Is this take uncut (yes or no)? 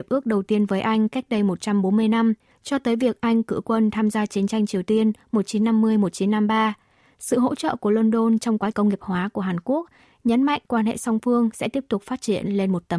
no